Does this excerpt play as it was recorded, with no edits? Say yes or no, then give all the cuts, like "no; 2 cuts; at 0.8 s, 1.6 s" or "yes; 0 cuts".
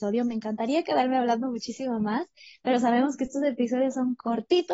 yes; 0 cuts